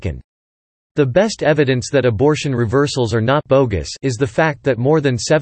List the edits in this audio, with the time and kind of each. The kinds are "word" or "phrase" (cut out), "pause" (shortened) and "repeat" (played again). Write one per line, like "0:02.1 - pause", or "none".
none